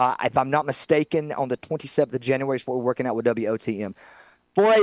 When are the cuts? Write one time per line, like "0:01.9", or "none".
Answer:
none